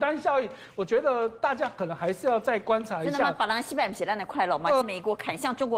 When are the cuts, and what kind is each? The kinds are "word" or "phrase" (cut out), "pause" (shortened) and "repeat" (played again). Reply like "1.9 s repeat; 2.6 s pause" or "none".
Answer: 4.8 s word